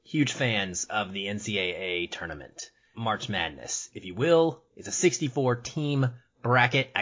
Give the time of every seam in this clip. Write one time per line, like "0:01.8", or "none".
0:02.9